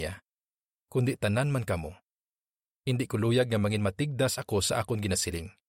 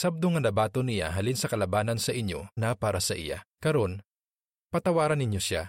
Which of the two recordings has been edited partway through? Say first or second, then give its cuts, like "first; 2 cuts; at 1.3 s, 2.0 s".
second; 2 cuts; at 2.6 s, 3.5 s